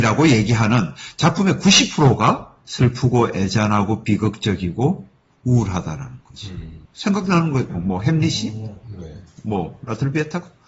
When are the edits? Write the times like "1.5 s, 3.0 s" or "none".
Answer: 2.6 s, 6.9 s, 7.7 s

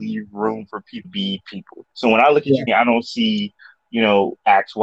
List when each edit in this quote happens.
1.0 s, 1.9 s, 2.7 s, 3.8 s

